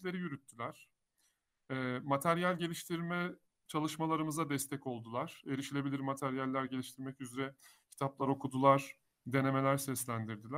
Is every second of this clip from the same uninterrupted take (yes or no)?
yes